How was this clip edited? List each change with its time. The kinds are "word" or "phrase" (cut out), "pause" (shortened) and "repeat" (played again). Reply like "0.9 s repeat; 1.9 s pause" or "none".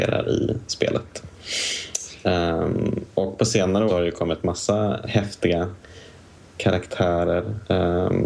3.9 s phrase; 5.0 s word